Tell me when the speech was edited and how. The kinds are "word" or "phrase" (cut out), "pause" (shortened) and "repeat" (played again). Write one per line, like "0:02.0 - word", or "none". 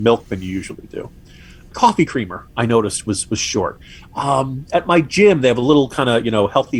none